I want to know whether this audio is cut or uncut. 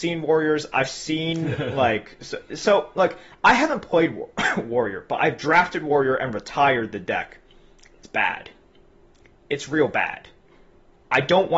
uncut